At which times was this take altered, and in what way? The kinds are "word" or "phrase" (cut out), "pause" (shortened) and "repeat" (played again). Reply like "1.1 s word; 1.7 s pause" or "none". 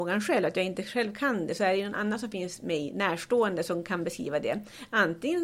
none